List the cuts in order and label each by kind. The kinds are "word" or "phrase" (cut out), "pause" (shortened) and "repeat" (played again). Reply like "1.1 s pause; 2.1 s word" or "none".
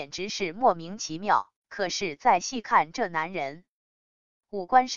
1.6 s pause